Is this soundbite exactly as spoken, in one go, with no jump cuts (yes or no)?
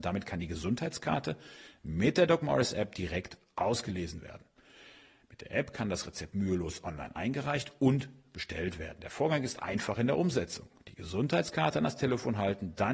yes